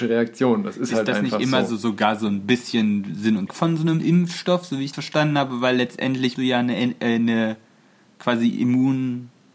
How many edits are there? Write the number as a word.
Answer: three